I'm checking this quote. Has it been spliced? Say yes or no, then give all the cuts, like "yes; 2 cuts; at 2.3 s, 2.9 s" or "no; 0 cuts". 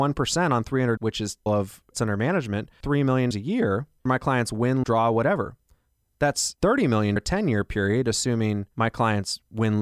yes; 8 cuts; at 1.0 s, 1.5 s, 1.9 s, 2.8 s, 3.3 s, 4.1 s, 4.8 s, 7.2 s